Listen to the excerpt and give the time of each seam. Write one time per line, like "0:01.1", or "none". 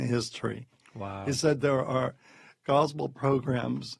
none